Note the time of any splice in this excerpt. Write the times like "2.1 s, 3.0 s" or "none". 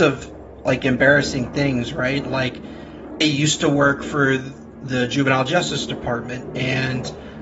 3.2 s